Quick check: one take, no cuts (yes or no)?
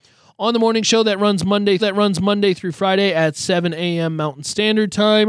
no